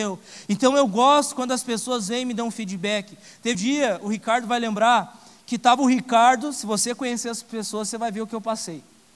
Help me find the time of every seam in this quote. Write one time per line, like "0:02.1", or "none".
0:03.5